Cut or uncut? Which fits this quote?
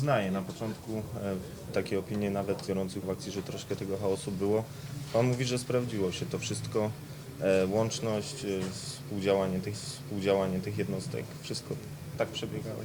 cut